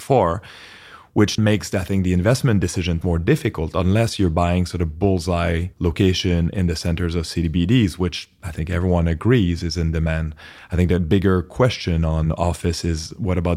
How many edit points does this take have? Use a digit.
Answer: 3